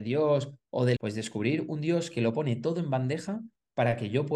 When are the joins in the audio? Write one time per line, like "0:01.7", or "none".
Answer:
0:01.0